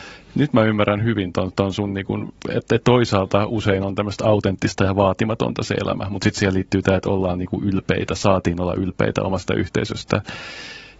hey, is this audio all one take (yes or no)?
yes